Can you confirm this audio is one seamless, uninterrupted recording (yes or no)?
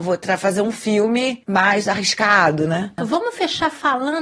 yes